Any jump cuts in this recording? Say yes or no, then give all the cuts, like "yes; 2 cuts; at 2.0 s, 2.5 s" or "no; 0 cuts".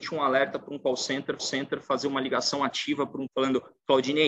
yes; 2 cuts; at 1.4 s, 3.3 s